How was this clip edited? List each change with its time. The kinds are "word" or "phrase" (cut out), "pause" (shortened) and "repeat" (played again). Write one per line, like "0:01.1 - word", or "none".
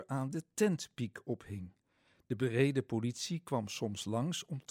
none